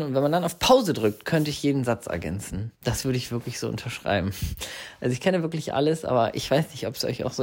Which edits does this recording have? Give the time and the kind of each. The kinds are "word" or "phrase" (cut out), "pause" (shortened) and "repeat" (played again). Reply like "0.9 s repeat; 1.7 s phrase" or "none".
2.7 s pause